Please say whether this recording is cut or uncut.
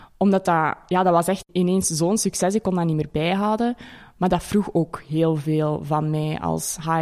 uncut